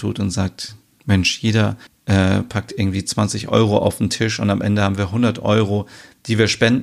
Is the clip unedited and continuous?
no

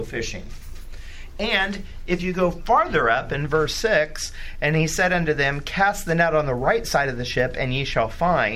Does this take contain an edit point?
no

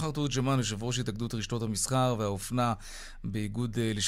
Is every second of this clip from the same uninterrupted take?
yes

